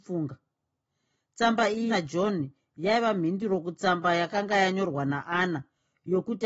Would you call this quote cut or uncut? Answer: cut